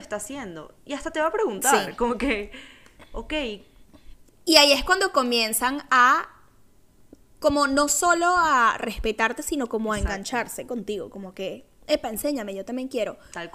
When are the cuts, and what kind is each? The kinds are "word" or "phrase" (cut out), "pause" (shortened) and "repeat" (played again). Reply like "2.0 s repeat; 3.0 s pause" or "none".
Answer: none